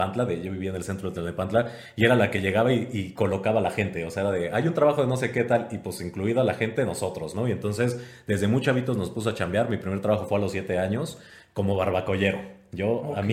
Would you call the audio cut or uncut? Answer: uncut